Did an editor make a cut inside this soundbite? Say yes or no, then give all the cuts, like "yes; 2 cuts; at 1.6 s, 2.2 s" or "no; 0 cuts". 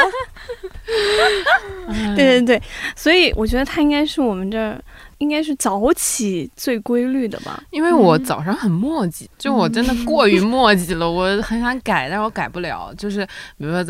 yes; 1 cut; at 9.3 s